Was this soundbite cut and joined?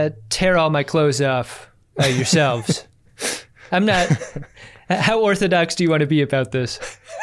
no; 0 cuts

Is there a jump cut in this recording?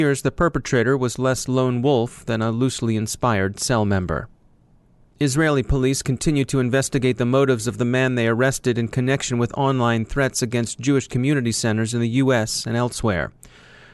no; 0 cuts

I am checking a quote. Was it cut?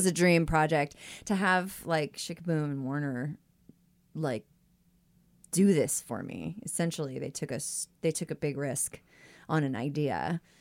no; 0 cuts

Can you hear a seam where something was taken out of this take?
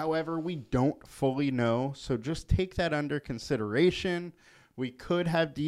no; 0 cuts

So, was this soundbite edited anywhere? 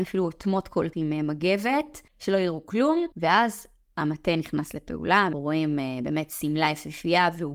yes; 4 cuts; at 0.9 s, 2.1 s, 3.1 s, 5.3 s

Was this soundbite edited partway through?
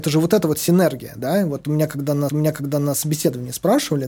yes; 1 cut; at 2.3 s

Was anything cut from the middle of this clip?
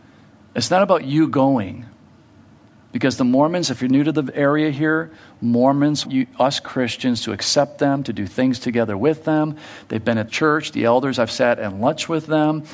yes; 2 cuts; at 6.0 s, 10.3 s

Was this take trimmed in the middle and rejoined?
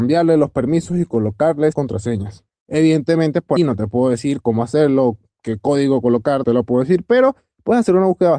yes; 3 cuts; at 1.7 s, 3.6 s, 6.4 s

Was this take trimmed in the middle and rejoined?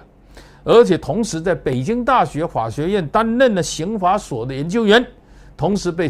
no; 0 cuts

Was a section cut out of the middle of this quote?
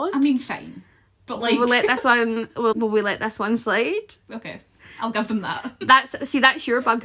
yes; 1 cut; at 2.7 s

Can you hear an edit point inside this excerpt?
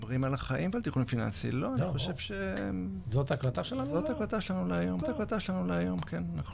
yes; 1 cut; at 5.0 s

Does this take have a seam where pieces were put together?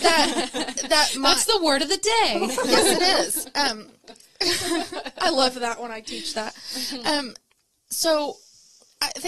no; 0 cuts

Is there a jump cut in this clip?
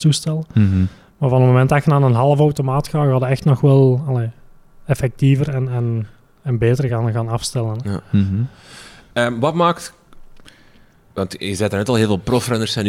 no; 0 cuts

